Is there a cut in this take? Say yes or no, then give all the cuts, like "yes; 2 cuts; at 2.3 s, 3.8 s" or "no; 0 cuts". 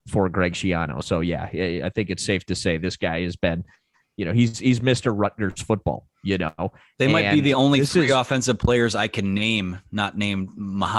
no; 0 cuts